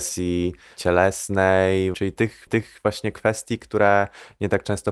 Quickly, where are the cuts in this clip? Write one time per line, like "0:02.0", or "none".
0:01.9
0:02.5